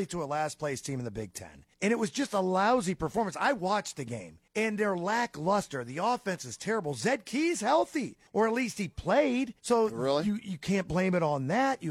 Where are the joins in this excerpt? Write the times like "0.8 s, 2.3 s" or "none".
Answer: 1.7 s, 4.5 s, 8.3 s, 9.6 s